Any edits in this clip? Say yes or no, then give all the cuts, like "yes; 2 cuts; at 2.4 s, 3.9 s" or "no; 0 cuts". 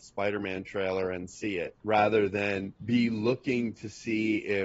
yes; 1 cut; at 2.8 s